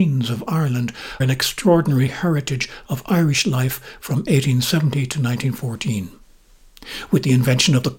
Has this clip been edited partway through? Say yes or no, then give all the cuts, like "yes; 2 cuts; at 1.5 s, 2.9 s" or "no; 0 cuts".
yes; 1 cut; at 1.2 s